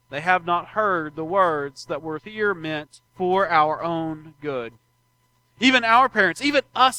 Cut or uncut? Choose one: cut